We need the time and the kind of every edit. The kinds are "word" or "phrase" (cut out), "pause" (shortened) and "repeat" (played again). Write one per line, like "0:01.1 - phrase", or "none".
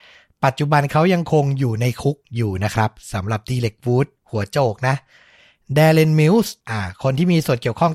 0:02.2 - pause
0:04.2 - pause
0:06.6 - pause